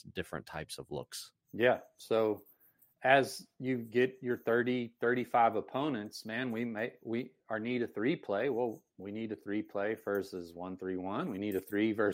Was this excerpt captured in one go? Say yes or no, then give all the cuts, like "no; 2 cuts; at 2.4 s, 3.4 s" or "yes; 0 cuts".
no; 1 cut; at 1.4 s